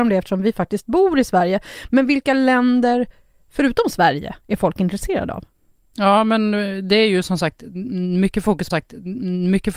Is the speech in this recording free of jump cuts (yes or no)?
no